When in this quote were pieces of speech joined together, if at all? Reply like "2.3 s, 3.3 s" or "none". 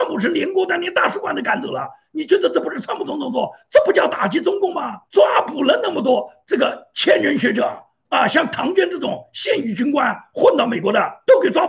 5.1 s